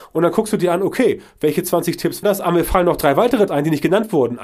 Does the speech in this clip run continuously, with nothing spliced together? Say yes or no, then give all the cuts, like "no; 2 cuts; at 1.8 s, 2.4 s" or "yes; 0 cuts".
no; 2 cuts; at 2.2 s, 3.5 s